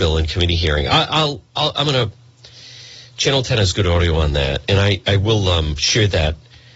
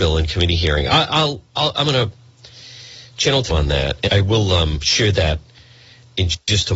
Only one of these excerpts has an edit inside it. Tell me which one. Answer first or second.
second